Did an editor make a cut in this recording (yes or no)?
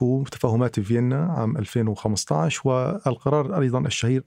no